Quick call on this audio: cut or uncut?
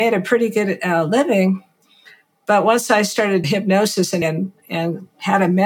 cut